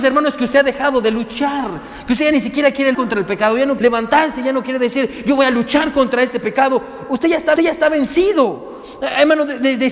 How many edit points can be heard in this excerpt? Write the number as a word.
three